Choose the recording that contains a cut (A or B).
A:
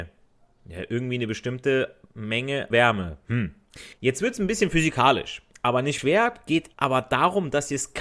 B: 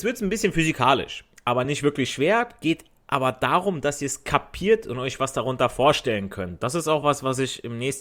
A